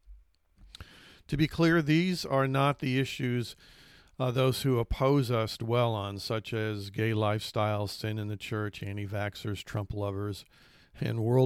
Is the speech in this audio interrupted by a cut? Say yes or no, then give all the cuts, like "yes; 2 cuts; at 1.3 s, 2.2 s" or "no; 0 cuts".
no; 0 cuts